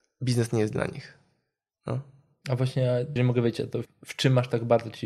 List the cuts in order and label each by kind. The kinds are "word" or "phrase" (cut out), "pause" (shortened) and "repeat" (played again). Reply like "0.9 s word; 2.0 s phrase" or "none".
3.2 s word; 3.8 s word